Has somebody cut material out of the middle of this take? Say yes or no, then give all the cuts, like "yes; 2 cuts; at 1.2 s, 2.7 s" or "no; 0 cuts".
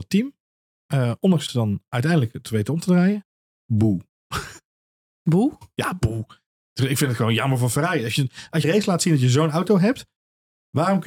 yes; 2 cuts; at 1.5 s, 8.6 s